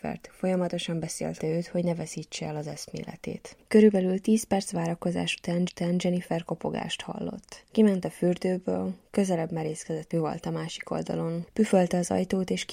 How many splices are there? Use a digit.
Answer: 3